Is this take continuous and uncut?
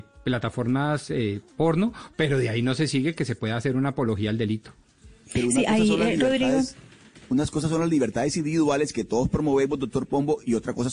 yes; 0 cuts

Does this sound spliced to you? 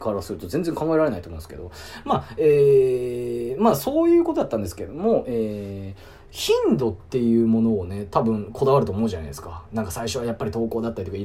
no; 0 cuts

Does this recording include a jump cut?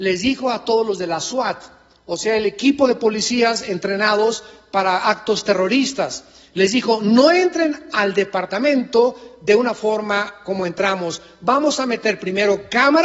no; 0 cuts

